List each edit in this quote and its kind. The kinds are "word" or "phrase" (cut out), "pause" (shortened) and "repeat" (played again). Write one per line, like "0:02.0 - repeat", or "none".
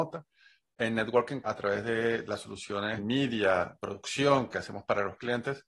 0:01.4 - word
0:03.0 - word
0:03.8 - word